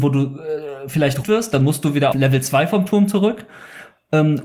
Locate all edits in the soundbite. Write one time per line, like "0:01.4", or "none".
0:01.2
0:02.1

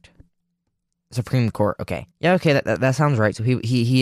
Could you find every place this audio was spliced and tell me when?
0:02.1

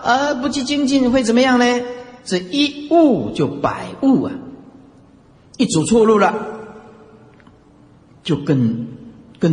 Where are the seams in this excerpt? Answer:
0:02.2

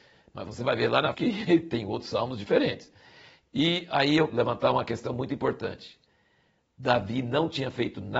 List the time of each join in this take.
0:01.1
0:04.3

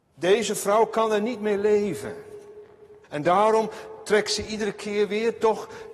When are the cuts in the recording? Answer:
0:03.0

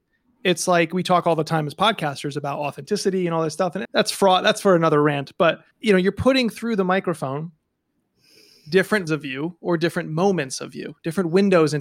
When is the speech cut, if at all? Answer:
0:03.8
0:05.7
0:09.1

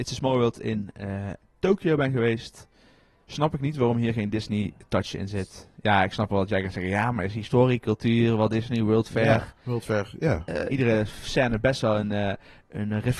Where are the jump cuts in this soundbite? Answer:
0:10.7

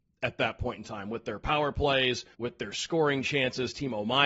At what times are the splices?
0:02.3

